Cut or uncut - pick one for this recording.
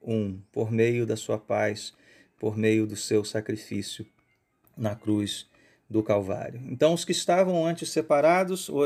uncut